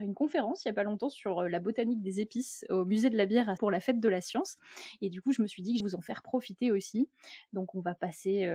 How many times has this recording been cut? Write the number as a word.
two